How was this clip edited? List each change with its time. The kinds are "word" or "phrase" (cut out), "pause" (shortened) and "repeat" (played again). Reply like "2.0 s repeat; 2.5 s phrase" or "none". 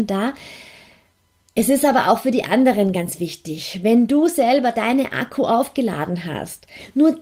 none